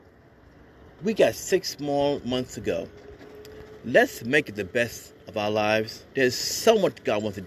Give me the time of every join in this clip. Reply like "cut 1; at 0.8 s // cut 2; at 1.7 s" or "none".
cut 1; at 5.2 s // cut 2; at 6.1 s